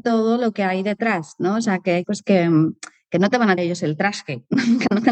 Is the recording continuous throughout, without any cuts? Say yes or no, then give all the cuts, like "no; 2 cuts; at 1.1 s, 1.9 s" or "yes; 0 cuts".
no; 2 cuts; at 2.0 s, 3.6 s